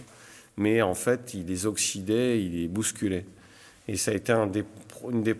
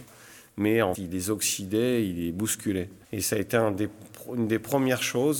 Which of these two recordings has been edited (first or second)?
second